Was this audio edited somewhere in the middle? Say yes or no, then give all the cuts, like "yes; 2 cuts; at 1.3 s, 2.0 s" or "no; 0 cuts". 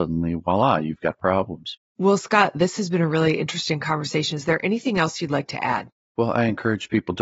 yes; 1 cut; at 1.9 s